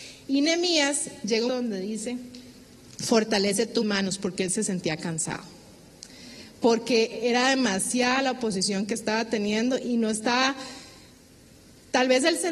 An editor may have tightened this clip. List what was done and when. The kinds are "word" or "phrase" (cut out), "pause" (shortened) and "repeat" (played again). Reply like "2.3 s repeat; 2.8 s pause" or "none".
1.5 s word; 3.8 s word